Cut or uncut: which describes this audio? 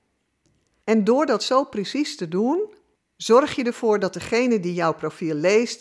uncut